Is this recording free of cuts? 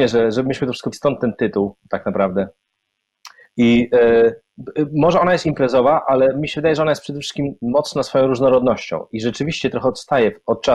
no; 2 cuts; at 0.9 s, 3.4 s

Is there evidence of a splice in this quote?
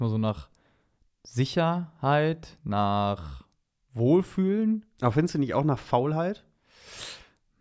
no; 0 cuts

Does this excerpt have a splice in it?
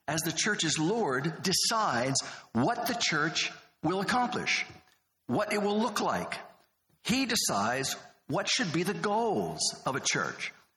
no; 0 cuts

